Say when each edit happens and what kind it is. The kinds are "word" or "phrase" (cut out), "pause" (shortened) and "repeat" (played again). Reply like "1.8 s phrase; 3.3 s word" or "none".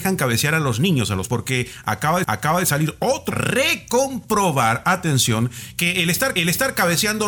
1.3 s word; 2.2 s repeat; 3.3 s phrase; 6.4 s repeat